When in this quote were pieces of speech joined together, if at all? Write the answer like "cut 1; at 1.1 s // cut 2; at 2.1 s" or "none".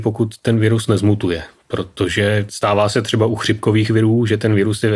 none

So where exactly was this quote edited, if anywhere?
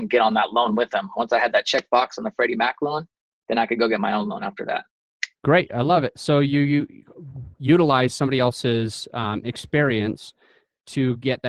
cut 1; at 5.4 s

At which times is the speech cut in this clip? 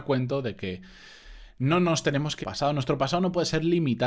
cut 1; at 2.4 s

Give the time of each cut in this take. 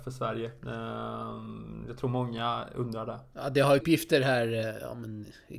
cut 1; at 3.8 s

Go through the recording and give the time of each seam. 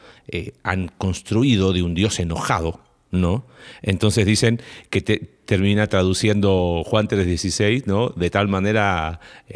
none

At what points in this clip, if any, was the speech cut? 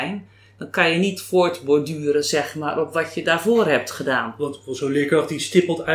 none

